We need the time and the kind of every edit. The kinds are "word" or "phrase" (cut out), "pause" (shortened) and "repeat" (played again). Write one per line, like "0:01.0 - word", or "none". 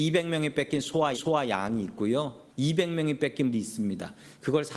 0:01.1 - repeat
0:02.5 - pause
0:03.5 - word